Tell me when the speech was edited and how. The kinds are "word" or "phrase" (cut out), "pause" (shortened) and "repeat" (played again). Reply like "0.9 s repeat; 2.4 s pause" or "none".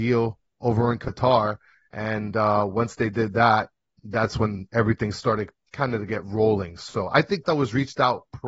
7.4 s word